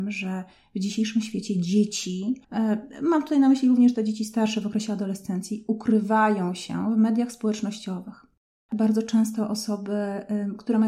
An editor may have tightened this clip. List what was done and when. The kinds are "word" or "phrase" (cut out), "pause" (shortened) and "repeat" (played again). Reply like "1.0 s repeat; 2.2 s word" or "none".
2.4 s pause